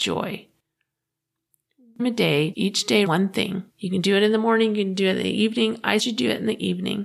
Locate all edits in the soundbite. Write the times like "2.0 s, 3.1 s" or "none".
2.0 s, 2.5 s, 3.1 s, 3.7 s, 6.0 s